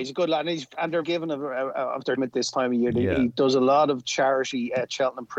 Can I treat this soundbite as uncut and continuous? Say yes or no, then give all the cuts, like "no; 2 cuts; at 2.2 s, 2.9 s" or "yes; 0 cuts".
no; 2 cuts; at 1.0 s, 2.2 s